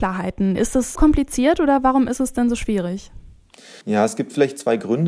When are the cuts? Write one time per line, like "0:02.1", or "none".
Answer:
0:01.0
0:03.8